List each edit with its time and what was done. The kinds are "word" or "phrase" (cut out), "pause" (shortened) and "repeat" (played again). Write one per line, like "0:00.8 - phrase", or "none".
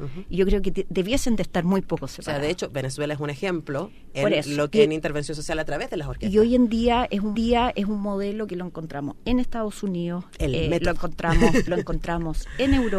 0:04.7 - phrase
0:07.3 - repeat
0:11.7 - word